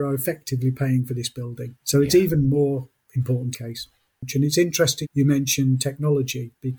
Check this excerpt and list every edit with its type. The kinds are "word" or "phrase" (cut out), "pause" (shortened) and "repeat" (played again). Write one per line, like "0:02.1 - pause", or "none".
0:01.8 - pause
0:03.5 - phrase
0:05.0 - word